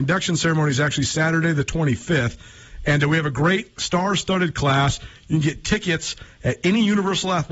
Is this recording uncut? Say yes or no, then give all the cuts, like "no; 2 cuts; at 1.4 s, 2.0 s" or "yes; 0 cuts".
yes; 0 cuts